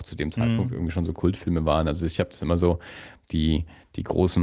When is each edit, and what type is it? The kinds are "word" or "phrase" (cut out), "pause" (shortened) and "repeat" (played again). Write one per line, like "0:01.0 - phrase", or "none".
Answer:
none